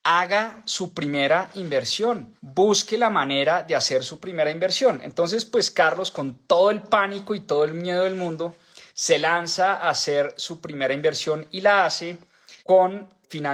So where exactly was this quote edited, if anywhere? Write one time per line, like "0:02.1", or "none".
0:02.4
0:08.9
0:12.6